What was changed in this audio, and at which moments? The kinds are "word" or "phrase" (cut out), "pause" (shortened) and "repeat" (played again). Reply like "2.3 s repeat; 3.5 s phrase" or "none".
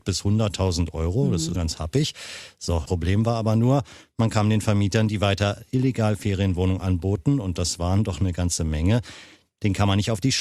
1.6 s word; 2.9 s word